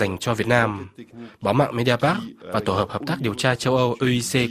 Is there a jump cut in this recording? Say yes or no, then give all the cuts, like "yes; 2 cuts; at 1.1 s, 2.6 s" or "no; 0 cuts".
no; 0 cuts